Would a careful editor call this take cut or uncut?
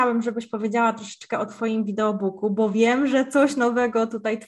uncut